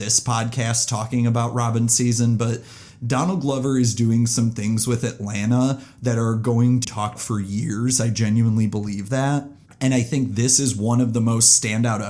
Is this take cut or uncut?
cut